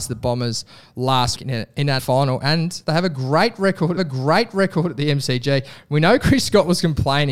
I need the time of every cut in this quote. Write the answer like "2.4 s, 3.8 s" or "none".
1.4 s, 2.0 s, 4.0 s